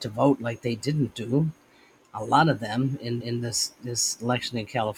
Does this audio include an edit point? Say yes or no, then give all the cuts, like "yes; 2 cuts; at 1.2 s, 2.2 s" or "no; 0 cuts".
yes; 1 cut; at 3.2 s